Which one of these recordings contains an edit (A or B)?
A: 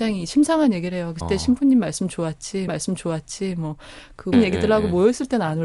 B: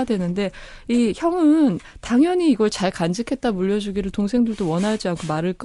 A